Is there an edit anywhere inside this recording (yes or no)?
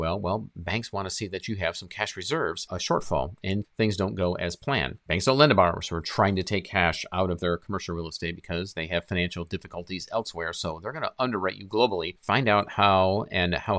yes